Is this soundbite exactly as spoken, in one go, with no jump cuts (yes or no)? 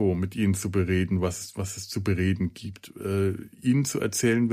no